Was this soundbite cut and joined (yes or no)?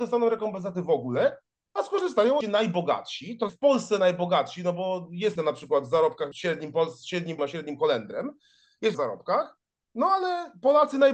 yes